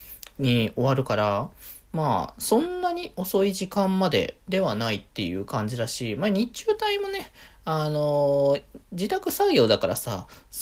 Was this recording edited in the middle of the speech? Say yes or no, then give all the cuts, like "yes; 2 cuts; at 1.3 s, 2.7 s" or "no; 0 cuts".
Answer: no; 0 cuts